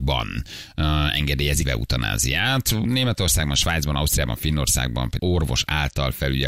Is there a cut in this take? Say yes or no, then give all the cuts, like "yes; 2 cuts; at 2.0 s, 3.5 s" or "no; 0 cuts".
yes; 2 cuts; at 1.6 s, 5.2 s